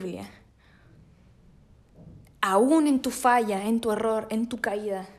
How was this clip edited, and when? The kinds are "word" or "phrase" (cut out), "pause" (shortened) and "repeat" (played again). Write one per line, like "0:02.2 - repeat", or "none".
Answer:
none